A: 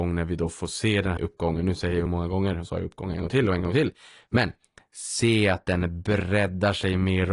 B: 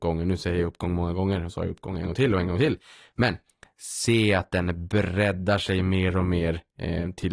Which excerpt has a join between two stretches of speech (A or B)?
A